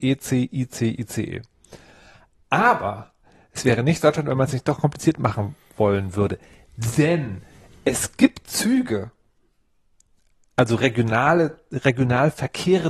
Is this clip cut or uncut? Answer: uncut